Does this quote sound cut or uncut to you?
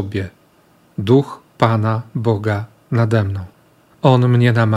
uncut